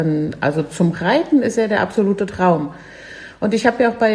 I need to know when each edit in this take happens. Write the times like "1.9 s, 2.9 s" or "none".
none